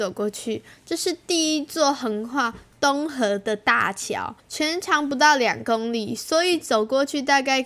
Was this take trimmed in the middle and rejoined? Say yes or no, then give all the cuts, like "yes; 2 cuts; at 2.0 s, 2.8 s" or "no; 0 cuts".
yes; 1 cut; at 4.4 s